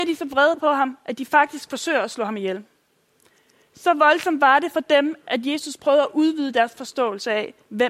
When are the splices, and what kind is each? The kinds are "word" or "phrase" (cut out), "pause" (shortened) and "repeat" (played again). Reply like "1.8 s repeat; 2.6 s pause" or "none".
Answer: none